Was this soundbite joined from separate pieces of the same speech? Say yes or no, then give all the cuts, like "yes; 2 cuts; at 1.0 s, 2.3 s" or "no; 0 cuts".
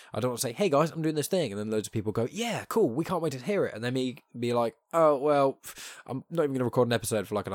no; 0 cuts